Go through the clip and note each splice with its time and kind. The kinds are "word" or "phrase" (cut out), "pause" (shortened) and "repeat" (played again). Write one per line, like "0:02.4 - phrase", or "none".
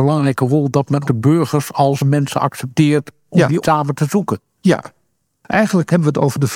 0:01.0 - word
0:02.0 - word
0:03.6 - word